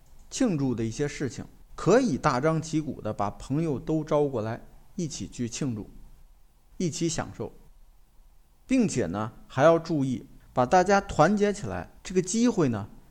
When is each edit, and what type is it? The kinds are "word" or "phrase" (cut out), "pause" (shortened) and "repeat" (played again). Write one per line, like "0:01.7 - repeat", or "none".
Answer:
0:01.7 - pause